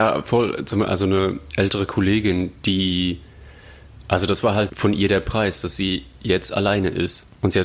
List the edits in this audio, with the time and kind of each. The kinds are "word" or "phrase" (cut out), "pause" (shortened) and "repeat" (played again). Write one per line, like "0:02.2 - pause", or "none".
0:04.7 - word

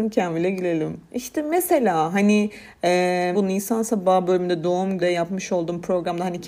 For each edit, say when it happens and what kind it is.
0:03.3 - phrase
0:05.0 - word

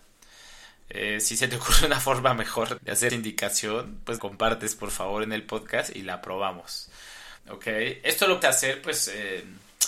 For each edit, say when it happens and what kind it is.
0:02.8 - word
0:03.1 - word
0:04.2 - phrase
0:07.4 - pause
0:08.4 - word

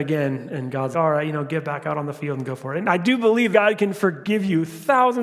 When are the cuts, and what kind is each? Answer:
0:00.9 - word
0:03.5 - word

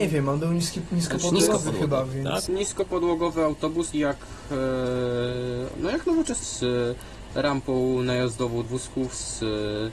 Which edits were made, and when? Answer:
0:02.5 - word
0:03.9 - word
0:06.4 - word
0:08.6 - word

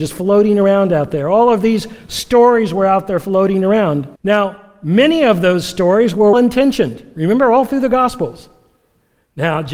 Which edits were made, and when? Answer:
0:04.2 - pause
0:06.3 - word

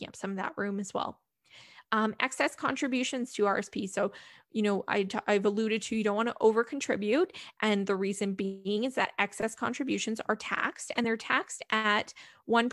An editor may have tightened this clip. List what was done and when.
none

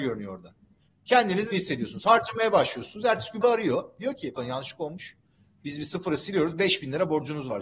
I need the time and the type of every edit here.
0:01.5 - word
0:03.4 - word
0:04.4 - word

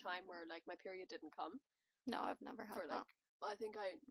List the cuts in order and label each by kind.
none

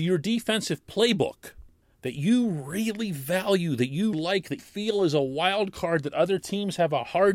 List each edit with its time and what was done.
0:01.8 - pause
0:04.1 - word
0:04.6 - word

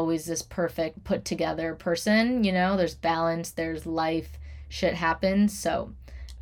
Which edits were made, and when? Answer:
0:00.9 - phrase

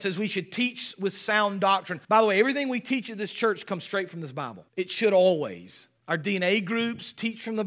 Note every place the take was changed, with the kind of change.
0:02.0 - pause
0:04.7 - pause
0:06.0 - pause

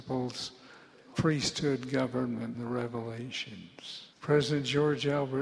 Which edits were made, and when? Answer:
0:01.1 - word
0:02.5 - phrase
0:04.1 - pause

